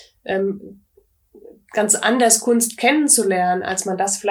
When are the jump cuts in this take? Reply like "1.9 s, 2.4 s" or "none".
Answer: none